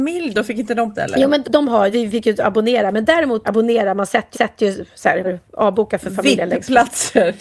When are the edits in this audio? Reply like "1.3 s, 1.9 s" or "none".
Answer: 0.9 s, 1.4 s, 1.9 s, 3.4 s, 4.3 s, 5.2 s